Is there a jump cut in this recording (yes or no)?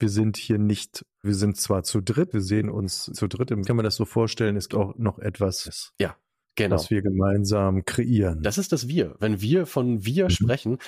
yes